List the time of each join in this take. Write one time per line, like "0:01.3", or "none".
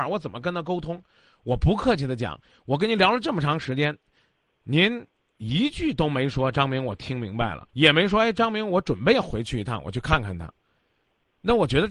0:07.7